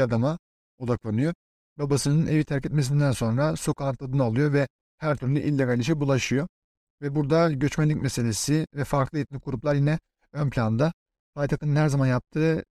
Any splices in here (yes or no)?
no